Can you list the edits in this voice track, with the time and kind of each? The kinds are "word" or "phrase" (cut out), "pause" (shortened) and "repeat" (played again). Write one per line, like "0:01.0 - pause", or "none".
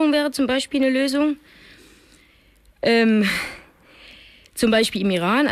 none